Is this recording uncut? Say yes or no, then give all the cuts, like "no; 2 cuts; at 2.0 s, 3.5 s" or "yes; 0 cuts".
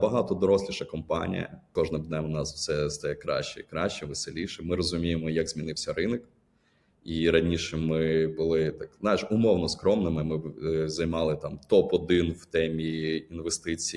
yes; 0 cuts